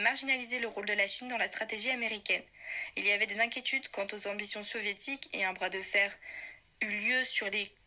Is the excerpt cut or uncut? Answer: uncut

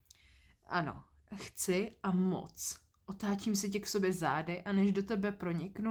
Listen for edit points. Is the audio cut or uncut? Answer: uncut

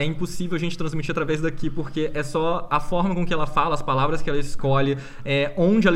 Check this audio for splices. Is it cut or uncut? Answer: uncut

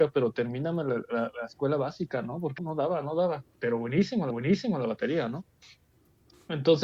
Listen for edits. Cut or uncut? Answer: cut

